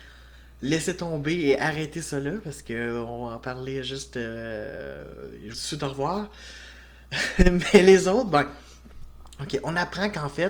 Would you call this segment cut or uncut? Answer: cut